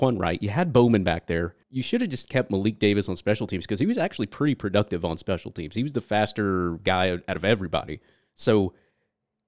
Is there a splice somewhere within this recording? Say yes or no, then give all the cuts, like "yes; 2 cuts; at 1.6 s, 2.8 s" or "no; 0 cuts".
yes; 1 cut; at 1.6 s